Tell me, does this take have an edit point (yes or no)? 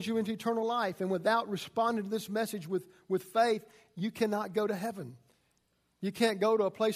no